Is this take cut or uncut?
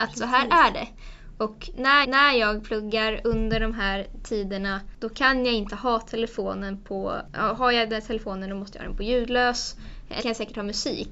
cut